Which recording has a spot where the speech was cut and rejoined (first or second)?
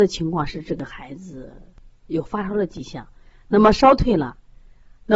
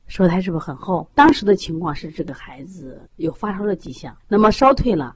second